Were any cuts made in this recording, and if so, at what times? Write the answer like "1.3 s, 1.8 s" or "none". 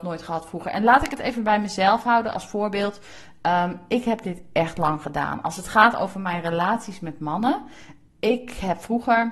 none